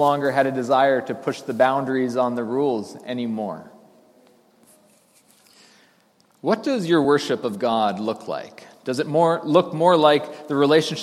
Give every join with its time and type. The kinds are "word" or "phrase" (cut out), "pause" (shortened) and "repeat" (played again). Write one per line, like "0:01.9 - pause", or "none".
none